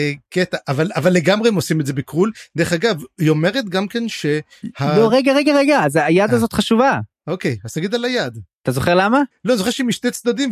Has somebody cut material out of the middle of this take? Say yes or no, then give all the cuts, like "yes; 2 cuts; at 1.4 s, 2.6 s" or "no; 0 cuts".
no; 0 cuts